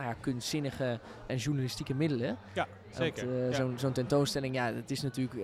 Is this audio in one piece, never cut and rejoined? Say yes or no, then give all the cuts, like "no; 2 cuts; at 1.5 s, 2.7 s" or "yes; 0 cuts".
no; 1 cut; at 1.3 s